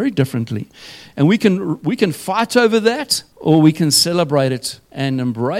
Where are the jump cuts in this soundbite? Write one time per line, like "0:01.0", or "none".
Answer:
0:03.3